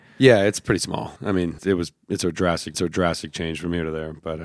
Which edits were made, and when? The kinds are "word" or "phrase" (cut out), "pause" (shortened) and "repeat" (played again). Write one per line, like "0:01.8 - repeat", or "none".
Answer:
0:01.2 - pause
0:01.6 - word
0:02.7 - repeat

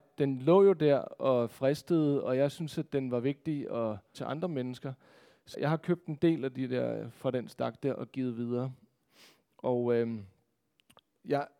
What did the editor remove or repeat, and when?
0:04.1 - word
0:05.5 - word

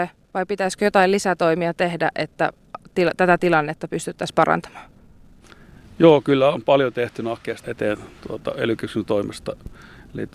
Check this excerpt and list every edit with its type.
0:07.6 - word

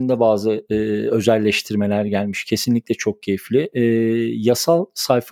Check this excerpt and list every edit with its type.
none

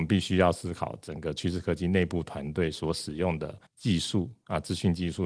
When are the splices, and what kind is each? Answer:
0:03.7 - pause

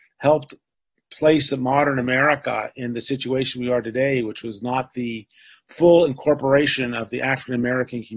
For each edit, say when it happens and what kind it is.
none

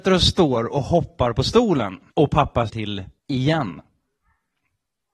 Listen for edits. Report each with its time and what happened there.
0:02.1 - pause
0:02.7 - word
0:03.2 - pause

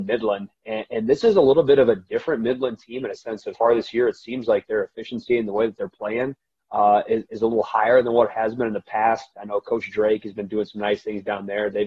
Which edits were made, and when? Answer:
0:03.5 - word

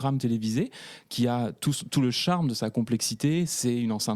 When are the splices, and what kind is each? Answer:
none

